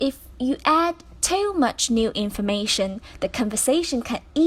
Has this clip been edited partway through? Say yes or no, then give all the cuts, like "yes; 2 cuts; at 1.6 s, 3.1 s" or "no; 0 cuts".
no; 0 cuts